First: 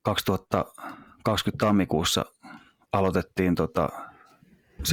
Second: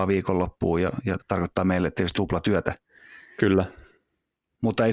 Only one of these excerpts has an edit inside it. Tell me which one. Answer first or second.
second